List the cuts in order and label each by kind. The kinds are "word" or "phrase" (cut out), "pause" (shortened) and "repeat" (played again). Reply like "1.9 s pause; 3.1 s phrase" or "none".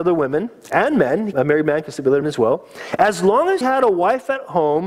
1.3 s word; 2.2 s word; 3.6 s word